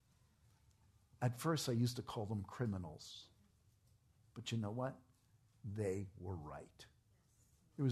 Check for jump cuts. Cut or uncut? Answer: uncut